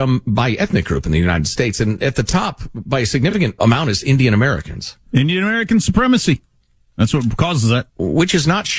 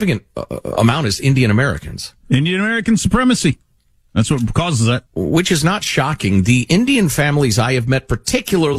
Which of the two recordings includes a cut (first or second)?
first